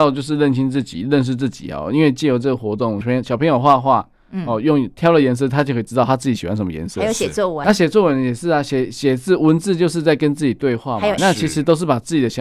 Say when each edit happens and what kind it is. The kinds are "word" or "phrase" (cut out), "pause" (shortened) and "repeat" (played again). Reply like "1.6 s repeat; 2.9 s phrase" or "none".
3.0 s phrase; 7.6 s word; 11.2 s phrase

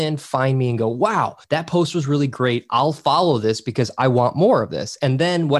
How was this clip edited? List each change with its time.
1.4 s pause

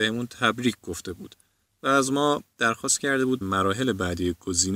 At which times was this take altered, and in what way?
3.4 s word

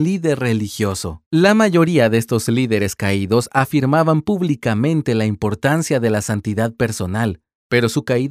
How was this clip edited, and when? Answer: 1.3 s pause

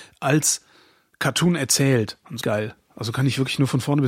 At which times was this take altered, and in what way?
2.4 s phrase

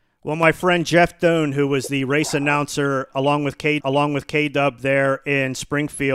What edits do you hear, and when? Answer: 3.8 s repeat

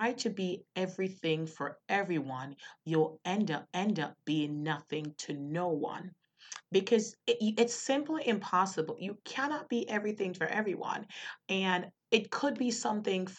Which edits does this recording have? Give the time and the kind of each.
3.7 s repeat; 7.2 s pause; 11.9 s word

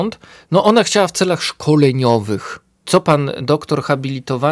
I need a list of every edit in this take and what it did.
2.8 s word

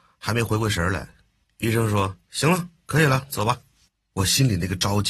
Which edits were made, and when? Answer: none

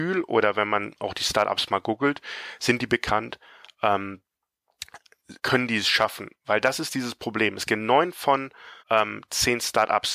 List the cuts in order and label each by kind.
5.4 s pause; 8.8 s pause

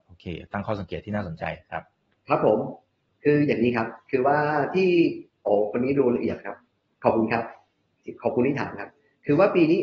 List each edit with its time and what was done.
none

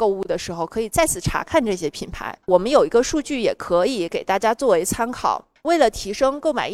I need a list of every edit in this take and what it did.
2.4 s pause

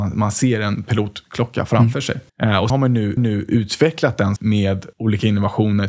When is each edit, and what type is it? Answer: 2.3 s pause; 2.7 s word; 3.2 s repeat; 4.4 s word; 4.9 s pause

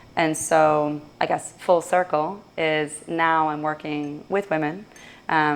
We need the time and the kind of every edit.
1.1 s pause

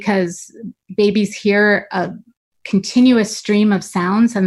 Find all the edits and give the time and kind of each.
none

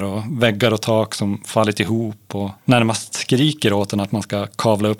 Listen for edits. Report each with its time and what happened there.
2.6 s pause

